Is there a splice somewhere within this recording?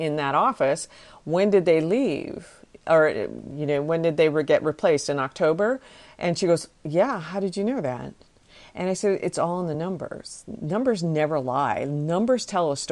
no; 0 cuts

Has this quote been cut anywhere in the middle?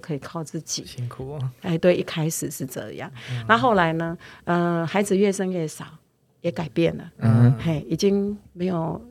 no; 0 cuts

